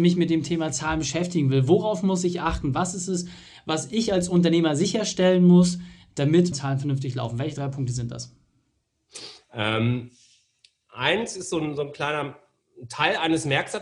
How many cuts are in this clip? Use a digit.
1